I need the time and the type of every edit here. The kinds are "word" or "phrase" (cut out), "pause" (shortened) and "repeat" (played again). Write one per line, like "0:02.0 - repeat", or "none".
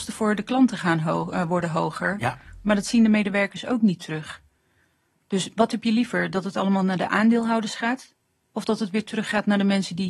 none